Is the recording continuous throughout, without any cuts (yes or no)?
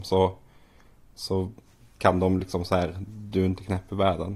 yes